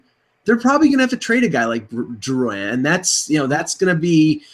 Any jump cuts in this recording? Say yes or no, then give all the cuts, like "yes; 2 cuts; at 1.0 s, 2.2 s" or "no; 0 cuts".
no; 0 cuts